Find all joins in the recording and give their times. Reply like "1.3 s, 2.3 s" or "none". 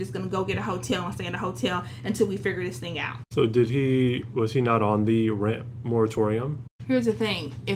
none

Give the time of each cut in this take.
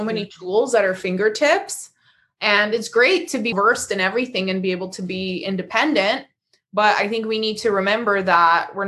3.5 s

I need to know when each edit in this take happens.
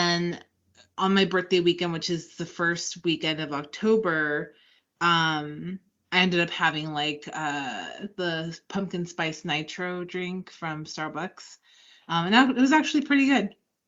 none

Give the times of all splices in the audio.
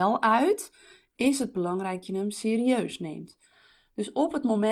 2.0 s

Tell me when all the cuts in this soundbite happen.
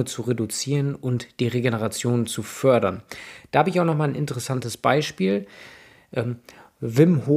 none

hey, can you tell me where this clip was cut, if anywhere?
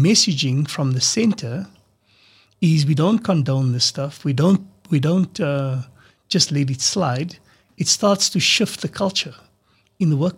none

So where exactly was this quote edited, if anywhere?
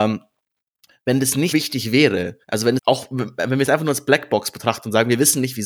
1.5 s, 2.4 s, 2.8 s

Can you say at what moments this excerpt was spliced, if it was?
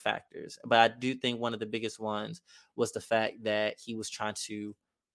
none

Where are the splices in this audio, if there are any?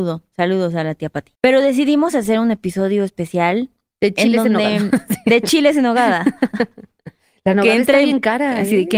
1.3 s

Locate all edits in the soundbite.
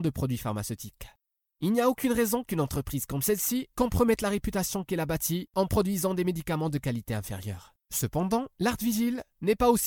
none

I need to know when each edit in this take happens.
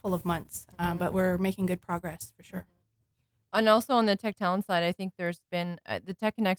none

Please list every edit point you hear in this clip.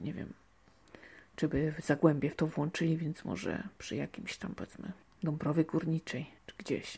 none

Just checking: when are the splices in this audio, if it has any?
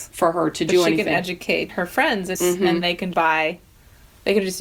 1.7 s, 2.3 s, 2.8 s, 3.1 s

